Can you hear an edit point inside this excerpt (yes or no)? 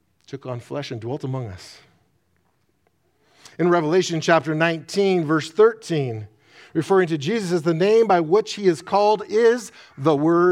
no